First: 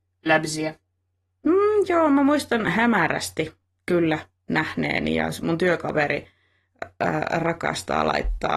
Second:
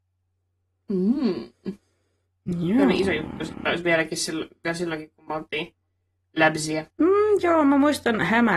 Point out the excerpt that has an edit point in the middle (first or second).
second